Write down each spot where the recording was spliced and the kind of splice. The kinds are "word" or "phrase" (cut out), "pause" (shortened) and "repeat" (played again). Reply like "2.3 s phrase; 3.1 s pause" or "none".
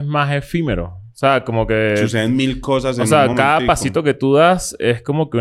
none